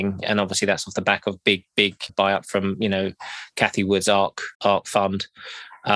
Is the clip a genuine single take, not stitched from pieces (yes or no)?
no